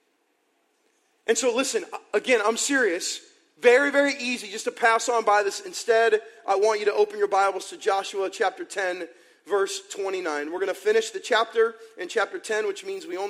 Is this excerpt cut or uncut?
uncut